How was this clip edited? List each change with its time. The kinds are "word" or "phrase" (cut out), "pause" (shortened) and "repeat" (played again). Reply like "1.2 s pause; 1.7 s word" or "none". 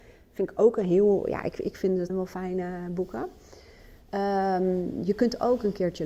2.1 s phrase